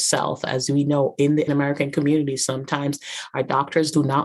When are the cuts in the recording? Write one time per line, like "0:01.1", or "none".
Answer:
0:01.5